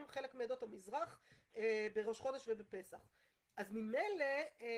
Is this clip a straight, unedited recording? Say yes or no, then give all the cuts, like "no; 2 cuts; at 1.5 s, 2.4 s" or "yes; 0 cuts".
yes; 0 cuts